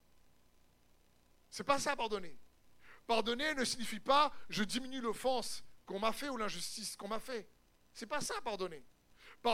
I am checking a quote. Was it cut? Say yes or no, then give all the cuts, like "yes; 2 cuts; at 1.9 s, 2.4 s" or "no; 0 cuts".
no; 0 cuts